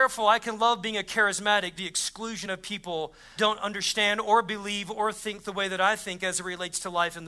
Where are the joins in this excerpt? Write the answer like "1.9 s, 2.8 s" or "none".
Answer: 1.8 s, 3.4 s